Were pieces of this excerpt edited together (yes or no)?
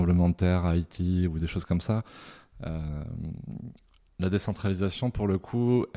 no